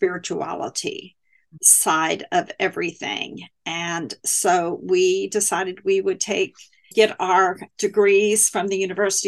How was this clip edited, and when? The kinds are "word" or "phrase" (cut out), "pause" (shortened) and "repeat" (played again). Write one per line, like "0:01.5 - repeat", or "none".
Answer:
none

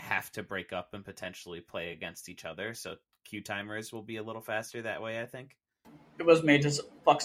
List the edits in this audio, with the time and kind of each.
none

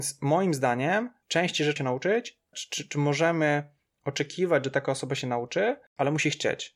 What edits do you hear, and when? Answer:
0:01.8 - word
0:02.5 - word

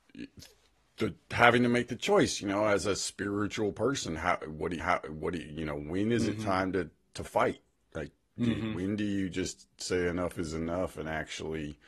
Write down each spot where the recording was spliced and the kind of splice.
0:04.8 - repeat

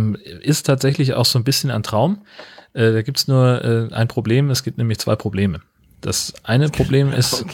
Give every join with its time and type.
none

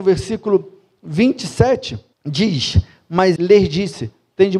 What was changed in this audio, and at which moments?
0:02.1 - pause
0:03.4 - word

